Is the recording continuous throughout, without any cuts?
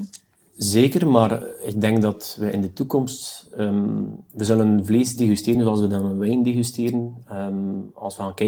yes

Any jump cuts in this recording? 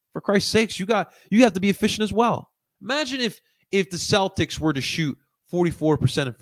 no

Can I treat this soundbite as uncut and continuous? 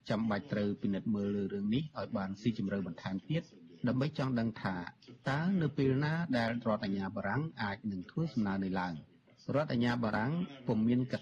yes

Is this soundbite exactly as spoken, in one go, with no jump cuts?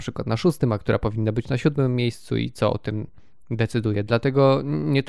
yes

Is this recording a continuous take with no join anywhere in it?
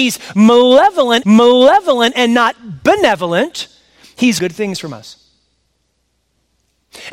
no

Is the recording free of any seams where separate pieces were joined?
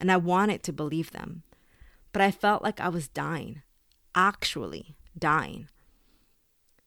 yes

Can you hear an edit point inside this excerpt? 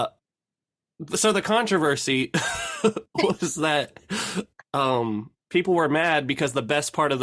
yes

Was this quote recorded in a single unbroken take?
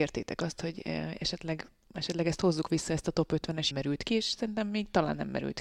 no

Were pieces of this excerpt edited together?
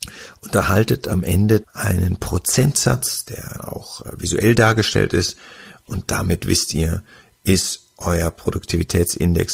yes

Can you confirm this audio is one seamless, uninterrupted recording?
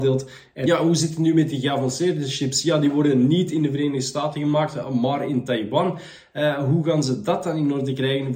yes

